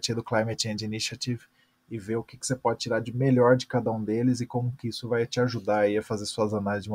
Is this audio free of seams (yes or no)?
yes